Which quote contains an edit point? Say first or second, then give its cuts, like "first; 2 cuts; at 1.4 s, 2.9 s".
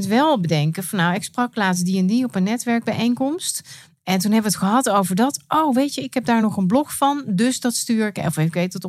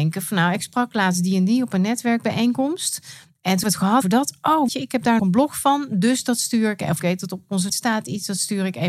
second; 6 cuts; at 3.6 s, 4.0 s, 4.7 s, 5.2 s, 7.0 s, 7.7 s